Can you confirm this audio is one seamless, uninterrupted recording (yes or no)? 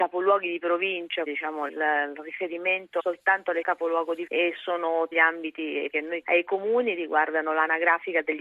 no